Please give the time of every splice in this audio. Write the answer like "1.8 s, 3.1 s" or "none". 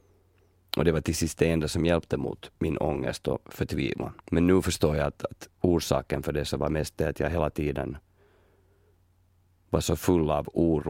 2.5 s, 4.2 s, 5.5 s